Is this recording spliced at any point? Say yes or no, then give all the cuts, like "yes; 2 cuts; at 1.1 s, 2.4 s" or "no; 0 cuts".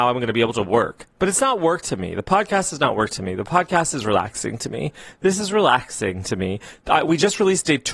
no; 0 cuts